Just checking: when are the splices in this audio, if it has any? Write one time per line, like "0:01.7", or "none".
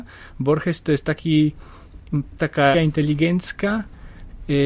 0:02.4
0:02.7